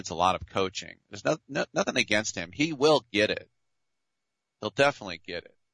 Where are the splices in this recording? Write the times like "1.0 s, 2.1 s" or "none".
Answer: none

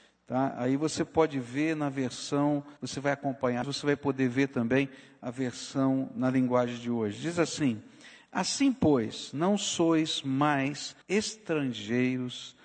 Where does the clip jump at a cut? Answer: 2.8 s, 3.6 s, 11.0 s

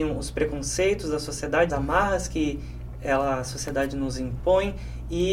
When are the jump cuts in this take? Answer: 1.7 s

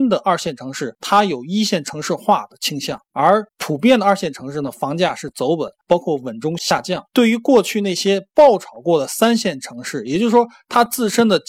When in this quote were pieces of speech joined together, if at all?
3.5 s, 7.1 s

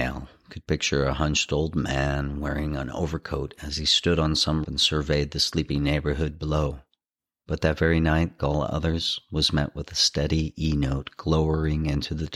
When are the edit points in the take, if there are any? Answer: 4.6 s, 8.4 s

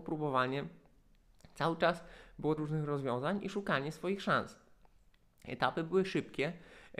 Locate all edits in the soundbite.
2.6 s

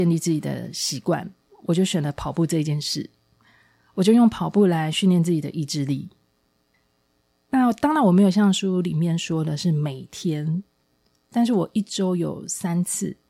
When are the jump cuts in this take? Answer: none

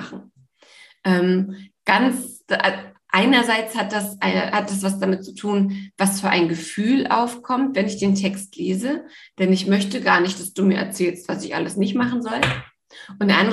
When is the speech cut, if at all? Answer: none

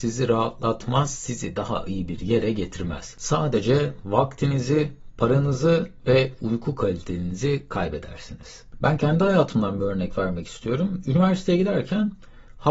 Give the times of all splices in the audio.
none

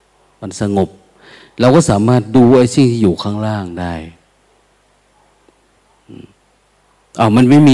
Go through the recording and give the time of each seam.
none

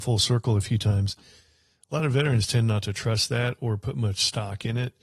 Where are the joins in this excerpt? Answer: none

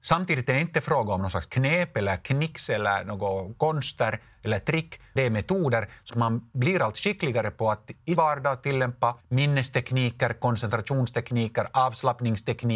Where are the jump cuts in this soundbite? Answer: 5.2 s, 6.1 s, 8.2 s, 9.2 s

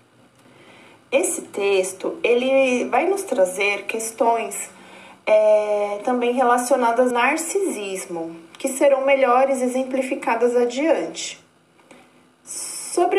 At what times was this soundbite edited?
7.1 s

